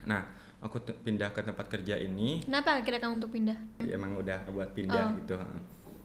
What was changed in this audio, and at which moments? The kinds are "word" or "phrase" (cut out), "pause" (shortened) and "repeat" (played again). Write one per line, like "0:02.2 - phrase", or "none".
0:03.1 - word
0:04.5 - word